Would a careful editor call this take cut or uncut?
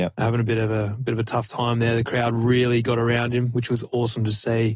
uncut